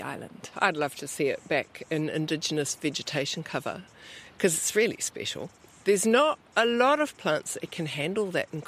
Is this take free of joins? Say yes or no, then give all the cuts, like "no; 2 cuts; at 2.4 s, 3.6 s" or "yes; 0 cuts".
yes; 0 cuts